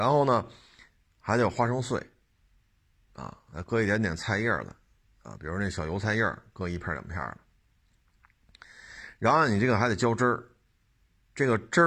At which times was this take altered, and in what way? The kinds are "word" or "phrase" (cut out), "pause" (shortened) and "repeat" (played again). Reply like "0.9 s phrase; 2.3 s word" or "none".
5.0 s pause